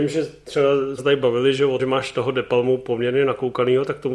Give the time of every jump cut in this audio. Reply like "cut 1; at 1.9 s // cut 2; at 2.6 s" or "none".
cut 1; at 1.0 s // cut 2; at 1.8 s